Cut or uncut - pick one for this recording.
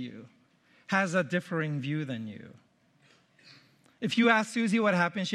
uncut